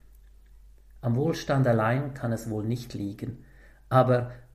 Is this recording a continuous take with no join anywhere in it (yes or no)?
yes